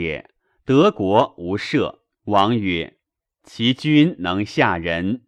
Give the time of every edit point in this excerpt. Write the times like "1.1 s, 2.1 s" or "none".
2.1 s, 3.0 s